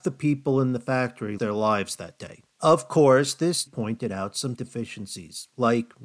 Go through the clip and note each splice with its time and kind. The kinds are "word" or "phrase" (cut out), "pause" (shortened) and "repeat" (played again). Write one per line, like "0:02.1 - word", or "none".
0:01.4 - word
0:02.5 - pause
0:03.7 - word
0:04.5 - word